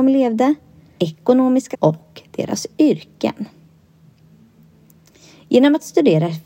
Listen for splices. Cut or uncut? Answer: cut